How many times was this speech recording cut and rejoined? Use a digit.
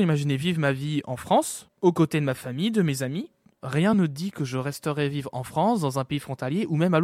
0